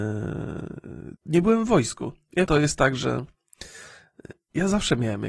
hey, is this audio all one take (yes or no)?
no